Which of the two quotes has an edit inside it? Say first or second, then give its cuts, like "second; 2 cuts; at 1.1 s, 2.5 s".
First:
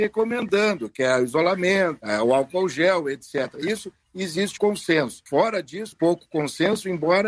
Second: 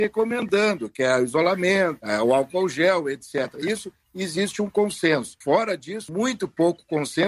first; 2 cuts; at 4.6 s, 5.9 s